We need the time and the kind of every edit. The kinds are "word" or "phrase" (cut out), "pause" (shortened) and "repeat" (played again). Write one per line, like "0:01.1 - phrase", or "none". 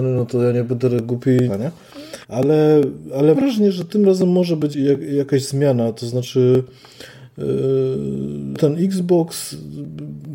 0:01.5 - phrase
0:02.2 - pause
0:03.3 - word
0:04.7 - word
0:08.6 - word